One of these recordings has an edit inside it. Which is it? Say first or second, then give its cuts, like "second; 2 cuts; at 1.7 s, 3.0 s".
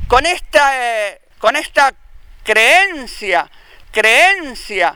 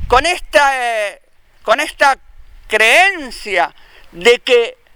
first; 2 cuts; at 1.3 s, 3.8 s